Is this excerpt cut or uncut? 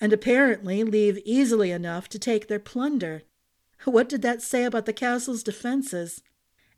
uncut